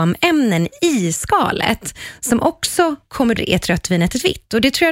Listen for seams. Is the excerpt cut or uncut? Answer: cut